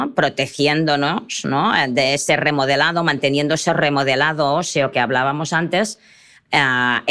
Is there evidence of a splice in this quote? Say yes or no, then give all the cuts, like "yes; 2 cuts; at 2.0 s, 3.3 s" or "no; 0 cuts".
no; 0 cuts